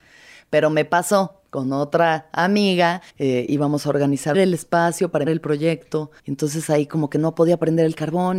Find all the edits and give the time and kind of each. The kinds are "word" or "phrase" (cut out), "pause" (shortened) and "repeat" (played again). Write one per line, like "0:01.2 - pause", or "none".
0:03.1 - pause
0:04.3 - phrase
0:05.3 - word
0:06.2 - pause